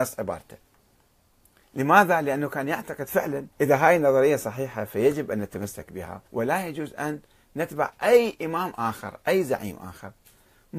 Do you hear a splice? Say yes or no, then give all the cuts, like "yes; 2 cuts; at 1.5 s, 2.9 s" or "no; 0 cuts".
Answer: yes; 2 cuts; at 3.5 s, 6.3 s